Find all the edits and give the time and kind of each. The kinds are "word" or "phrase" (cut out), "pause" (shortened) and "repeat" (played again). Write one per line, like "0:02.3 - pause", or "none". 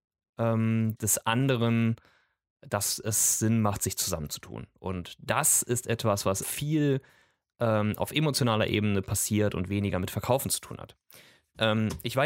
0:06.4 - word